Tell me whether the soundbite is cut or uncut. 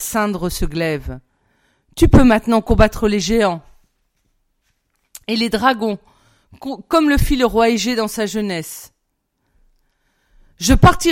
uncut